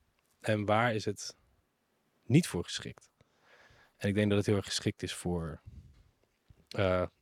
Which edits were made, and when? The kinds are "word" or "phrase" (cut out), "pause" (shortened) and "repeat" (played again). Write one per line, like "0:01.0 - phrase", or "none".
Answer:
none

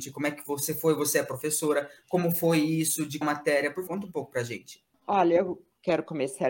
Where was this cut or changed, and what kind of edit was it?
0:03.2 - word
0:03.9 - word
0:04.9 - pause

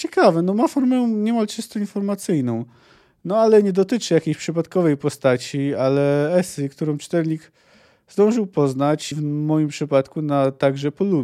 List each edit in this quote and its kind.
0:09.1 - word

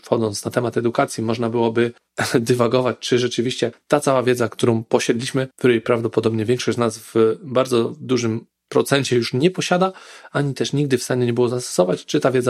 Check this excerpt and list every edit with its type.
0:05.5 - pause

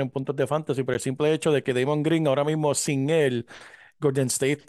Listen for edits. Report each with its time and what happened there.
none

